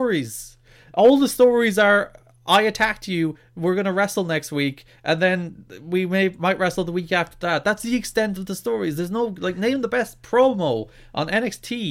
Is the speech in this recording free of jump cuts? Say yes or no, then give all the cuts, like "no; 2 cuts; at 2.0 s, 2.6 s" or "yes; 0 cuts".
yes; 0 cuts